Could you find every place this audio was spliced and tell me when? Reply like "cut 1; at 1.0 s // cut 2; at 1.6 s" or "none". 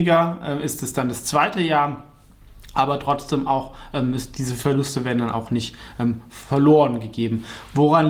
none